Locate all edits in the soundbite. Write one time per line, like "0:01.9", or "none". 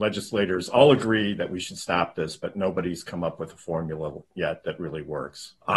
none